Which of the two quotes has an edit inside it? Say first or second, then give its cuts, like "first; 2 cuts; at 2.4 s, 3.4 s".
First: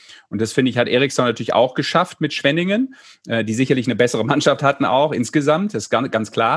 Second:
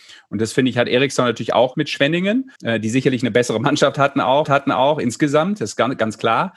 second; 3 cuts; at 1.7 s, 2.6 s, 4.4 s